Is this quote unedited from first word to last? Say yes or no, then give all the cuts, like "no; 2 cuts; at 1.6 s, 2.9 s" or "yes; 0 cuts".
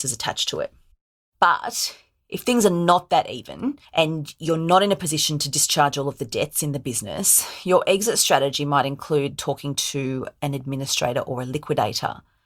yes; 0 cuts